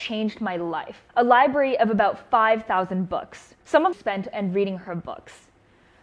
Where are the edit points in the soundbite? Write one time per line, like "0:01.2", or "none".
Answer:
0:01.1
0:03.6
0:03.9
0:04.3